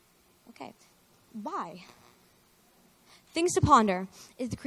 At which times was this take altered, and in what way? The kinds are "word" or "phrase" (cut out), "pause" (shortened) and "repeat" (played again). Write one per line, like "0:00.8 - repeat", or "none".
none